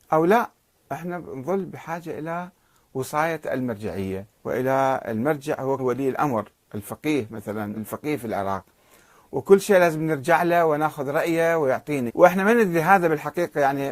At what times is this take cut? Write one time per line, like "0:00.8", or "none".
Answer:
0:04.4
0:05.8
0:07.7
0:12.1